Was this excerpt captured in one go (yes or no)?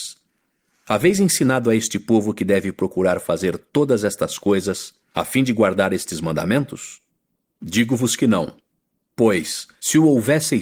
yes